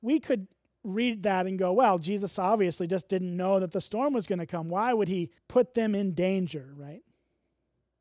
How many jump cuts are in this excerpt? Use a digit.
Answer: 1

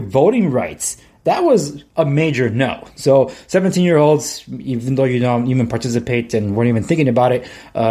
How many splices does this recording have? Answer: 0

